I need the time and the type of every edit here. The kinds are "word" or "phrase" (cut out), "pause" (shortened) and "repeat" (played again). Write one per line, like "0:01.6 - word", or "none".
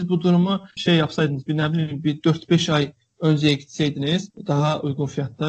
none